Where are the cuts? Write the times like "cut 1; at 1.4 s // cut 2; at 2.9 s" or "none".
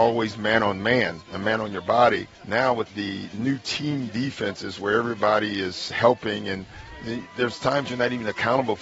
cut 1; at 2.3 s // cut 2; at 2.9 s